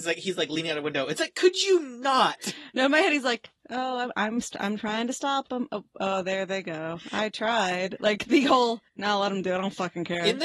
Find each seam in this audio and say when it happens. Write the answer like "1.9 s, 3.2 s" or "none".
none